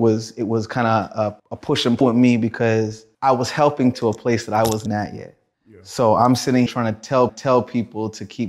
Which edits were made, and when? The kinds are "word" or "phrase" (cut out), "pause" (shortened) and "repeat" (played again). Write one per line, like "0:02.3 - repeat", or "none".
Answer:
0:01.4 - pause
0:02.0 - word
0:03.1 - pause
0:03.9 - phrase
0:04.9 - word
0:05.5 - pause
0:06.7 - word
0:07.3 - repeat